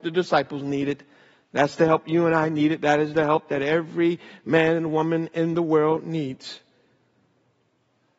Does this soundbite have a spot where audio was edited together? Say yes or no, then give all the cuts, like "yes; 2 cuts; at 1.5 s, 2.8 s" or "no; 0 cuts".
no; 0 cuts